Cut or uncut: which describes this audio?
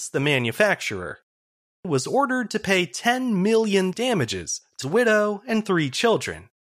cut